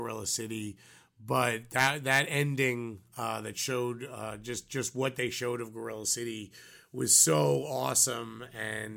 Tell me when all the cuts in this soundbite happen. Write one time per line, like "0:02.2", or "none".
none

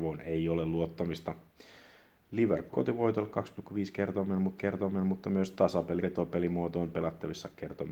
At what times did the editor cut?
0:02.7
0:04.6
0:06.0

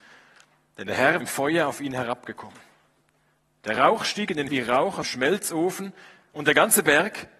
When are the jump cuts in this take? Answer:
0:01.2
0:04.5
0:05.0

